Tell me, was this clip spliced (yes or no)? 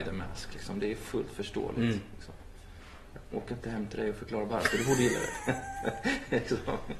yes